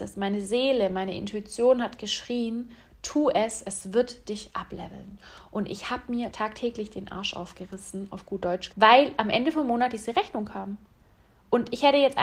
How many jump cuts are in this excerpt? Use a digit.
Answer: 2